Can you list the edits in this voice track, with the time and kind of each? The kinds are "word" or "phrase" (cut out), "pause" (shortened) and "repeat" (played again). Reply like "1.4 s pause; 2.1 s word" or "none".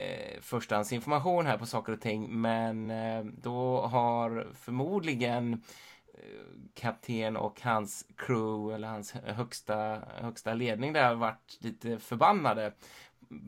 none